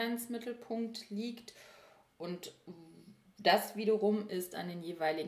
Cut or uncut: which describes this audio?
uncut